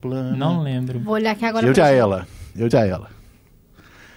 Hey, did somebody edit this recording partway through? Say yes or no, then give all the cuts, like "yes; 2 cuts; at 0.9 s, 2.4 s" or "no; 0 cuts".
yes; 2 cuts; at 1.7 s, 2.7 s